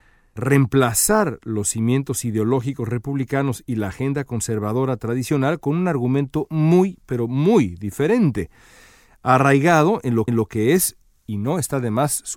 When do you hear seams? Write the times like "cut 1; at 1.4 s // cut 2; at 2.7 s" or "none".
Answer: cut 1; at 10.3 s